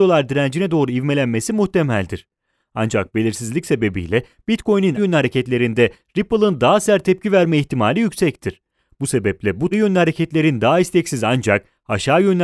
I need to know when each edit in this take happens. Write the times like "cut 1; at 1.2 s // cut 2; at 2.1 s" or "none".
cut 1; at 5.0 s // cut 2; at 9.7 s